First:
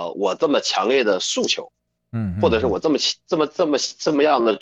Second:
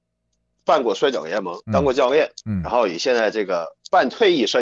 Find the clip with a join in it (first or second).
second